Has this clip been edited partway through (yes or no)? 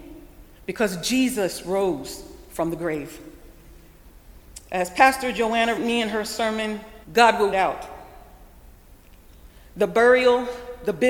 yes